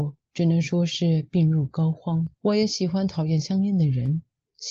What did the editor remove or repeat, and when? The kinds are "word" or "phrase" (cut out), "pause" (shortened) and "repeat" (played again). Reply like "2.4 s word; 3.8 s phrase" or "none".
2.3 s pause